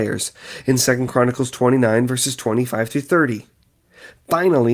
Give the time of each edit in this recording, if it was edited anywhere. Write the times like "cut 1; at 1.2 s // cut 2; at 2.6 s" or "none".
none